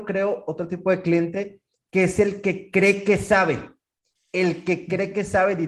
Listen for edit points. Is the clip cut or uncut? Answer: uncut